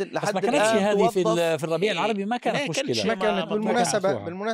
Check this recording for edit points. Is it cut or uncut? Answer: uncut